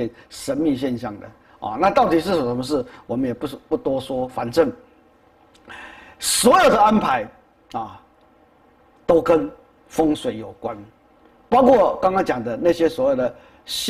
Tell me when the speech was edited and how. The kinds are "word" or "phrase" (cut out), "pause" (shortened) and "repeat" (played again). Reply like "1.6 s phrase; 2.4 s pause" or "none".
none